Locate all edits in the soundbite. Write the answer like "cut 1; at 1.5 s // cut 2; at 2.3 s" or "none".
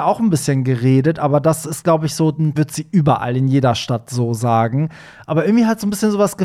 cut 1; at 2.6 s